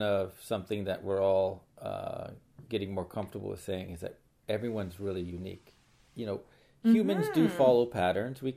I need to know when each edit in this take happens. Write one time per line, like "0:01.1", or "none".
none